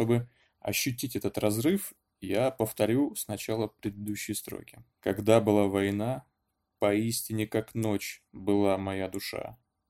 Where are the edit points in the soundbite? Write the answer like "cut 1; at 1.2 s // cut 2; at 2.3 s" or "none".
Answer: cut 1; at 4.9 s